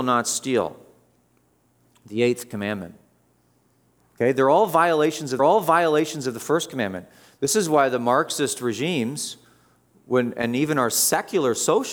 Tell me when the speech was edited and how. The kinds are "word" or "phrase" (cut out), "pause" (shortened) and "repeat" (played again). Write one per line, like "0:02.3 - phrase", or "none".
0:05.4 - repeat